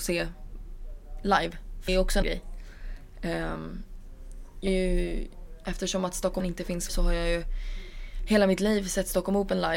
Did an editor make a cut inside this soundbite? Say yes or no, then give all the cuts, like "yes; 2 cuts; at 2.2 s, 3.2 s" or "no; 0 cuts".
yes; 5 cuts; at 1.9 s, 2.2 s, 4.7 s, 6.4 s, 6.9 s